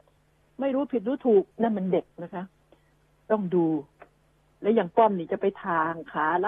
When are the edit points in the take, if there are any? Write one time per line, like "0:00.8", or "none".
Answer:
0:01.5
0:02.1